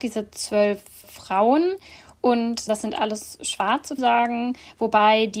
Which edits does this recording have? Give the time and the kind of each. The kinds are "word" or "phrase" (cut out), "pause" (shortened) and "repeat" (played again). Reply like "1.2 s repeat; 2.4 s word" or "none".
1.0 s word; 2.7 s word; 4.0 s phrase